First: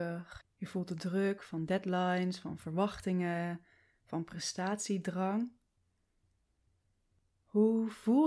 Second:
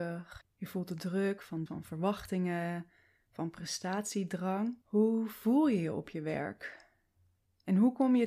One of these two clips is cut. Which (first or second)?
second